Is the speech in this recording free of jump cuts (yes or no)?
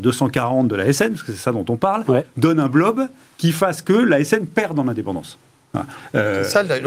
yes